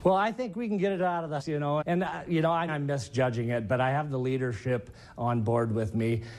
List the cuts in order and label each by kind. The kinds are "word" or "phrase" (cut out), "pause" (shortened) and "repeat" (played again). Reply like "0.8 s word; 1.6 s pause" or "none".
1.4 s word; 1.8 s word; 2.7 s word